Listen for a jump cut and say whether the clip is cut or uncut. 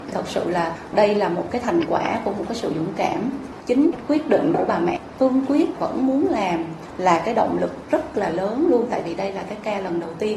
uncut